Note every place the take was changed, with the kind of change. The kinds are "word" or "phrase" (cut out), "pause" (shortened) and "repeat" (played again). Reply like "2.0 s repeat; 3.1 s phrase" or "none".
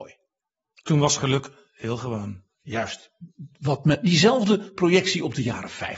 none